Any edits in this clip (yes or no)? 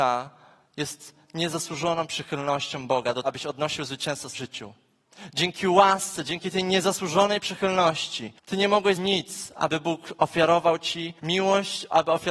yes